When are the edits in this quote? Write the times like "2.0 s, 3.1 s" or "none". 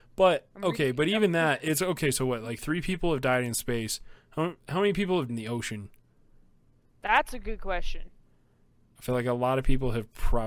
5.3 s